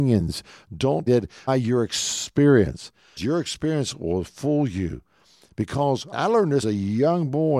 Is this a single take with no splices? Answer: no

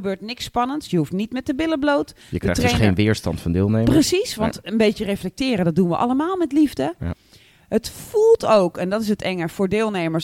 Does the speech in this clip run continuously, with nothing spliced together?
yes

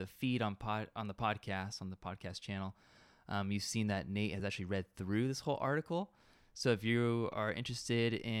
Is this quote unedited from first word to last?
yes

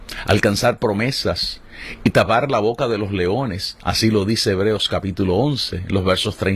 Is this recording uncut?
yes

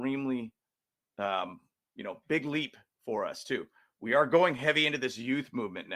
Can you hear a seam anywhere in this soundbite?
no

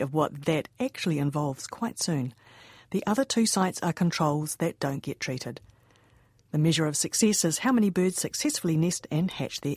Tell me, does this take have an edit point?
no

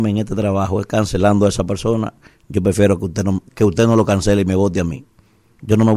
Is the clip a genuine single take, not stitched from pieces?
yes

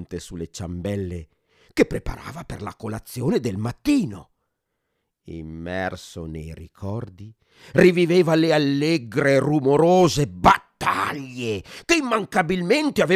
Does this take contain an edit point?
no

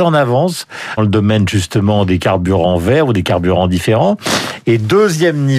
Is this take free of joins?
no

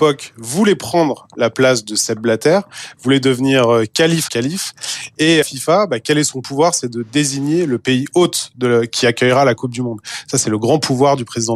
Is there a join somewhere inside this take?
yes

